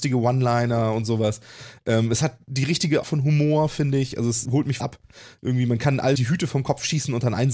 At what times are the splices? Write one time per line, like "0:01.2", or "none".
0:03.0
0:04.4
0:04.8
0:06.1